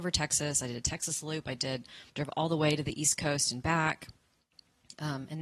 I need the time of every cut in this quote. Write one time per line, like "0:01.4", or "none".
0:02.1